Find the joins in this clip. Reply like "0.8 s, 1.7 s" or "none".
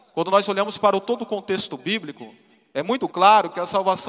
none